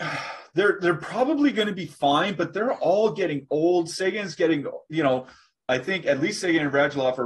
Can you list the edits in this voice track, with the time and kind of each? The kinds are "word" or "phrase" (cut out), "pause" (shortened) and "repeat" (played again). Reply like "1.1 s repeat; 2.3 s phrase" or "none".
none